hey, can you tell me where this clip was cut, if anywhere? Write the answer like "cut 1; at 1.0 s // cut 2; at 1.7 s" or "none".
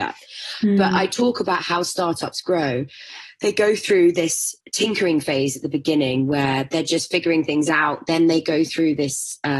cut 1; at 4.6 s